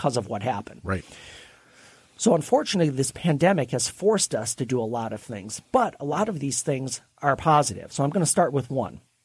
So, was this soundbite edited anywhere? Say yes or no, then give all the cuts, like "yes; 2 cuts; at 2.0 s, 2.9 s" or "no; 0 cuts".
no; 0 cuts